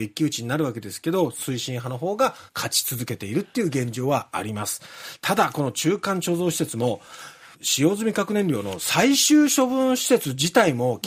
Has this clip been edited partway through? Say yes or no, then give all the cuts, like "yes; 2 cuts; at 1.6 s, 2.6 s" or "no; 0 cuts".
yes; 2 cuts; at 2.5 s, 7.5 s